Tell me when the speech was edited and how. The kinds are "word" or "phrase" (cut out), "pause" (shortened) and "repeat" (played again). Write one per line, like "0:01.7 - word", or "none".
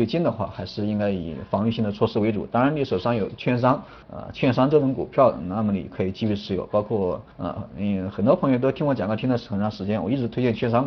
0:04.0 - pause
0:07.3 - pause